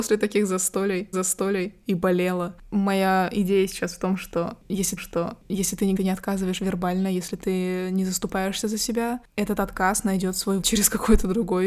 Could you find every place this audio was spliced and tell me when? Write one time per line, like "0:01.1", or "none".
0:01.1
0:05.0
0:06.0
0:10.6